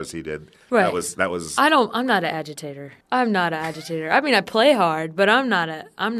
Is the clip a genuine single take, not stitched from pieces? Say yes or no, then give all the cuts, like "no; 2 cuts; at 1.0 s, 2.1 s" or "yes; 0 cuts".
no; 1 cut; at 3.0 s